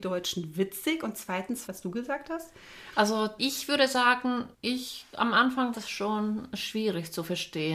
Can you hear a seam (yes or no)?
yes